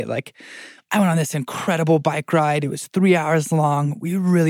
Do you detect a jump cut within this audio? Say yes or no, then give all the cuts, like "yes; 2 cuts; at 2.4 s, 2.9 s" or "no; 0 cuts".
no; 0 cuts